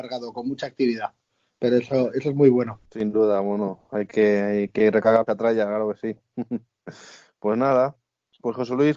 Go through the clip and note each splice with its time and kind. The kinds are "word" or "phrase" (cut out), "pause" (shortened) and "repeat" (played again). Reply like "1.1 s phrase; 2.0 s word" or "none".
2.9 s pause; 5.3 s phrase